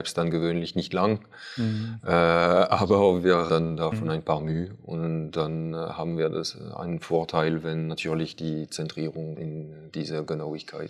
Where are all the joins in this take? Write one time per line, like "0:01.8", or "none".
0:03.5
0:03.9
0:09.4